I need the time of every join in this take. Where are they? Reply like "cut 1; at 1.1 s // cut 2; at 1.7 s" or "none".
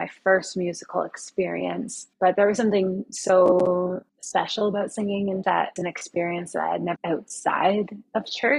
cut 1; at 2.1 s // cut 2; at 4.1 s // cut 3; at 5.4 s // cut 4; at 5.8 s // cut 5; at 7.0 s